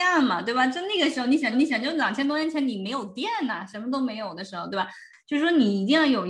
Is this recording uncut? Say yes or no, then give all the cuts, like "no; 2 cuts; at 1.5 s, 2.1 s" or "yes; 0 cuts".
no; 1 cut; at 1.5 s